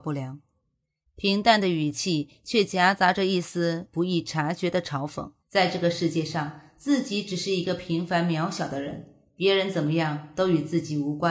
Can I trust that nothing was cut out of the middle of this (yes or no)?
no